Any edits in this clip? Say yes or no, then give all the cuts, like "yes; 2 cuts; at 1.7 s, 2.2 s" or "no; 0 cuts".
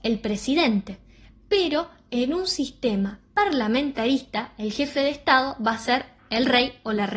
no; 0 cuts